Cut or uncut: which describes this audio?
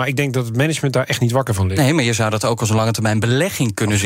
uncut